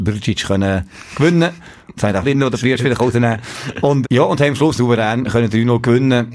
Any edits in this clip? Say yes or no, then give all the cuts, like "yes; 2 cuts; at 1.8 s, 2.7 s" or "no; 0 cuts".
yes; 3 cuts; at 2.2 s, 4.0 s, 4.8 s